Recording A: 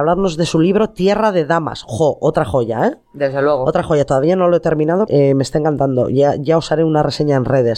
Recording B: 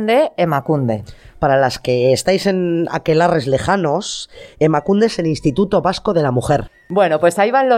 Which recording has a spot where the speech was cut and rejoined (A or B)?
A